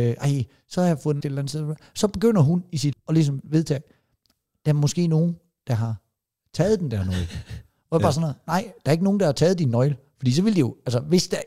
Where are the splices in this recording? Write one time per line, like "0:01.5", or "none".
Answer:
0:01.2
0:02.9